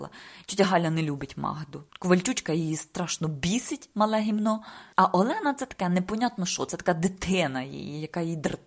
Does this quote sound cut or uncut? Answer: uncut